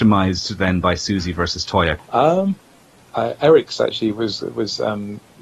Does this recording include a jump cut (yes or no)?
no